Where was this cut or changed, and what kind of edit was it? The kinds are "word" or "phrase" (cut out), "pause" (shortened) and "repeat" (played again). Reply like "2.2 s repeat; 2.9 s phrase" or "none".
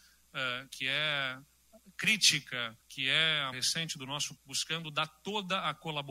2.8 s pause; 3.5 s phrase; 4.4 s word